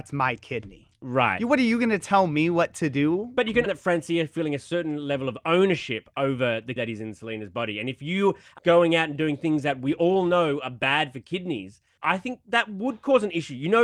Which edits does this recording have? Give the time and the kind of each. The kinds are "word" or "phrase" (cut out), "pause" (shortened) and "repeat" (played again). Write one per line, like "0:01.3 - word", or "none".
0:03.7 - word
0:06.8 - word
0:08.6 - word
0:12.0 - word